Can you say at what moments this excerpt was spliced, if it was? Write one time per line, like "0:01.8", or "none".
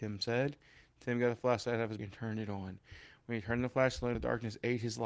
0:02.0
0:04.1